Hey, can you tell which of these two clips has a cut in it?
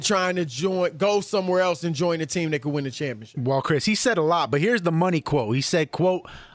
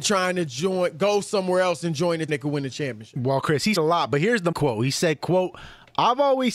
second; 3 cuts; at 2.3 s, 3.8 s, 4.5 s

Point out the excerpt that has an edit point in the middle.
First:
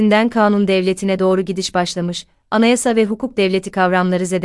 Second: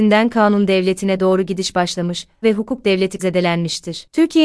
second; 2 cuts; at 2.4 s, 3.2 s

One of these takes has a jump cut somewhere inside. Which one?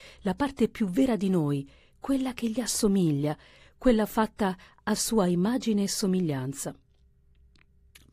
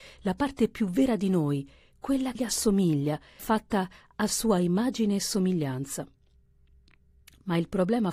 second; 2 cuts; at 2.4 s, 3.4 s

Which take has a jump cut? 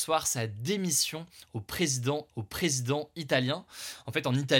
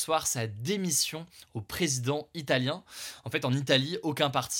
first; 1 cut; at 2.3 s

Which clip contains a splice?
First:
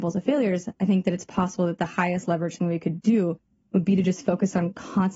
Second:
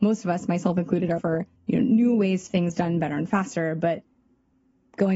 second; 3 cuts; at 1.2 s, 1.6 s, 2.5 s

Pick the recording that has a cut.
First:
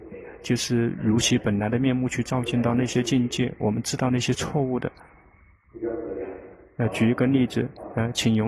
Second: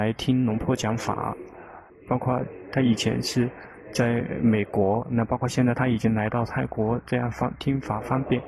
second; 1 cut; at 1.9 s

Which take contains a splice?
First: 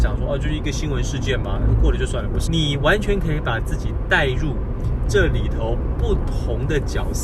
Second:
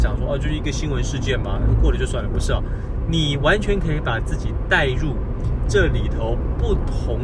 first; 1 cut; at 2.5 s

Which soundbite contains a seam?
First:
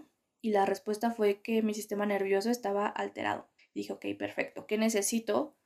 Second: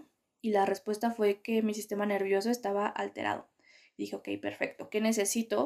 first; 1 cut; at 3.6 s

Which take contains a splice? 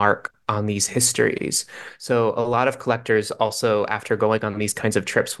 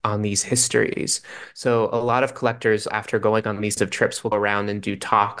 second; 3 cuts; at 2.9 s, 3.8 s, 4.3 s

